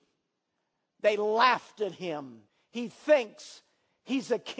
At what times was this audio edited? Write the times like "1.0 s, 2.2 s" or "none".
2.5 s

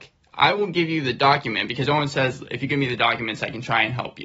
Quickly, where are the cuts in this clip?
none

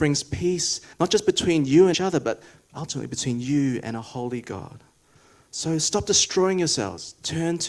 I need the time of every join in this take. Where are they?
0.9 s, 1.9 s

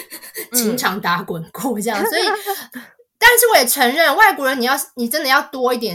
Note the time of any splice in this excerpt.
2.7 s

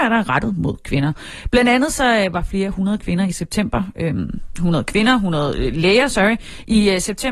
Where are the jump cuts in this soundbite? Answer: none

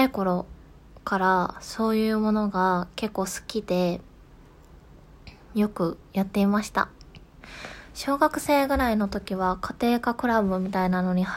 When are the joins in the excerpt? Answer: 6.0 s

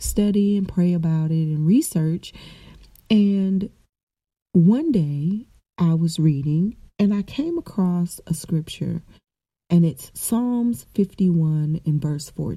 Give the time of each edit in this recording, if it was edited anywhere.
none

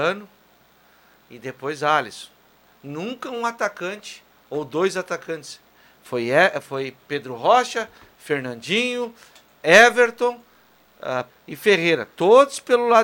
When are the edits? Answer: 11.3 s

